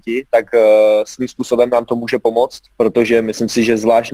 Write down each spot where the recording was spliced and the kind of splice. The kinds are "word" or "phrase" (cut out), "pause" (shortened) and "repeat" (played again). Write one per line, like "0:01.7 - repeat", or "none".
0:02.7 - pause

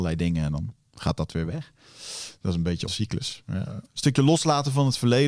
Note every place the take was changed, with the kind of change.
0:02.9 - word

